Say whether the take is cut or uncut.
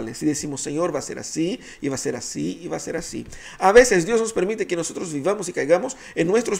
uncut